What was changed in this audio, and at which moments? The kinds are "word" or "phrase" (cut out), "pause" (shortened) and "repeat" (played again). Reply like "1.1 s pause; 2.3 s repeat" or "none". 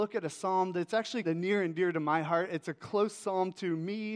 1.2 s word; 2.6 s word